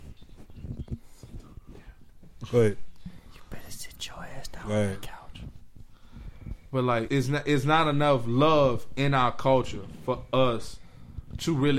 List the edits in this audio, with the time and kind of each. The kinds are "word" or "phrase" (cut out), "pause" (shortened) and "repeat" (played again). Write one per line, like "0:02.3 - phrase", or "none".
0:07.1 - word